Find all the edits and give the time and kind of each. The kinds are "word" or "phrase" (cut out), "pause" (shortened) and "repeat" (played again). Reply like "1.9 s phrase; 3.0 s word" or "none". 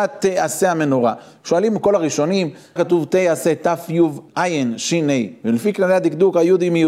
2.8 s word; 4.3 s word